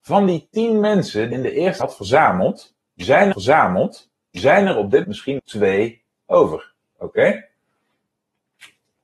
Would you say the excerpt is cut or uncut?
cut